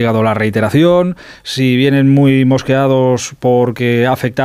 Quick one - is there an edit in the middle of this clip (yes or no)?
no